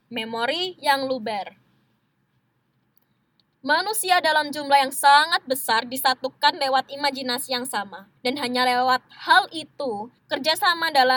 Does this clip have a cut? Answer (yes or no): yes